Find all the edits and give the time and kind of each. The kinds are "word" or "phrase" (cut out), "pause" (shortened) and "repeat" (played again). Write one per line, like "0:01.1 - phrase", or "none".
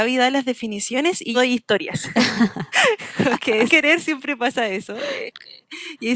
0:01.3 - word
0:03.7 - word